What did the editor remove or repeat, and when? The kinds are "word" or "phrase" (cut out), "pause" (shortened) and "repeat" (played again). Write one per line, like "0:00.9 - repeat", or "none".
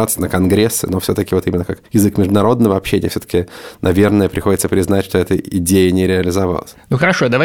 0:01.9 - pause